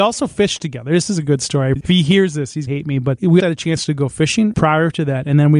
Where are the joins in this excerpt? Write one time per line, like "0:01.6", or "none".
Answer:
0:01.8
0:02.7
0:03.4